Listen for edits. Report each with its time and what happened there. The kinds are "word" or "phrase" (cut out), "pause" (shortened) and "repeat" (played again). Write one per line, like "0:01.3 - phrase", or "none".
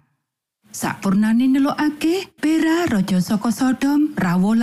0:02.4 - pause